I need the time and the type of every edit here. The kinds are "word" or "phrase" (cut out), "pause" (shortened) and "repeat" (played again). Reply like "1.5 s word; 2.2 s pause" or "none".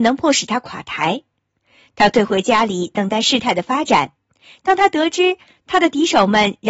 none